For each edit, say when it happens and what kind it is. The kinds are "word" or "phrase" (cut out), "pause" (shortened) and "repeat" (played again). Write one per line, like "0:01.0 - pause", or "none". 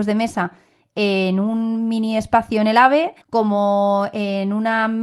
0:03.2 - pause